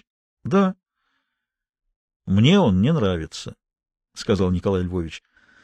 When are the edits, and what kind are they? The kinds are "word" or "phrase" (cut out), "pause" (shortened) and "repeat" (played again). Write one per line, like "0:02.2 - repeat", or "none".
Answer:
none